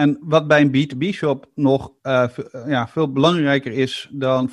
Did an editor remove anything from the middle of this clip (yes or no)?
no